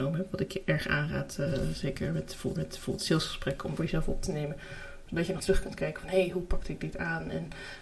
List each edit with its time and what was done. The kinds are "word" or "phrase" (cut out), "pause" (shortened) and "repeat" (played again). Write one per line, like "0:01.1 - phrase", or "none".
0:02.6 - repeat
0:03.8 - word
0:05.4 - word